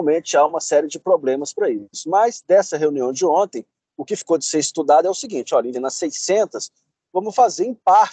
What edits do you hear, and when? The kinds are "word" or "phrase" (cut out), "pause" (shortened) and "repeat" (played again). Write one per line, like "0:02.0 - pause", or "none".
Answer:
0:05.7 - phrase